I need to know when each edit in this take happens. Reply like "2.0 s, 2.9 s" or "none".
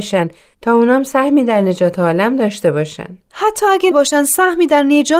3.9 s

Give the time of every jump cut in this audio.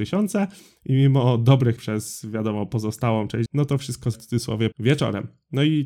1.8 s, 3.5 s, 4.1 s, 4.7 s

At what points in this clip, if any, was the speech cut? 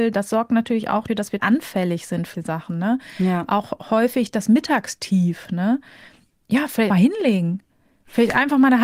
1.1 s, 1.4 s, 2.3 s, 6.9 s

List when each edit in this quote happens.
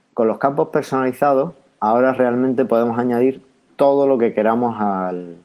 none

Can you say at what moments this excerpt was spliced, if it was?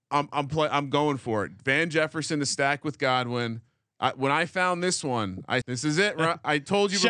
5.6 s

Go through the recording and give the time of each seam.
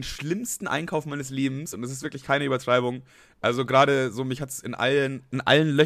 none

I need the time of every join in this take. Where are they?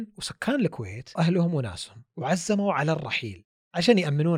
1.2 s

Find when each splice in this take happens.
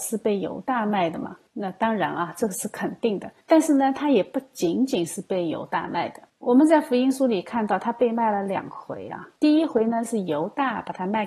1.5 s, 3.4 s, 6.3 s, 9.4 s

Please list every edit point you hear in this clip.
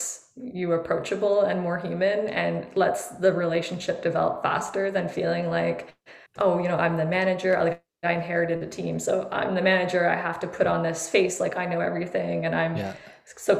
6.3 s

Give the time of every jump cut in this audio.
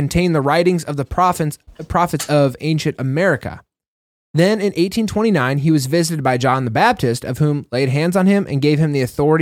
none

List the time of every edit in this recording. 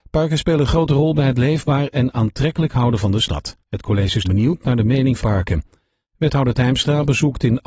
3.6 s, 4.2 s, 5.2 s

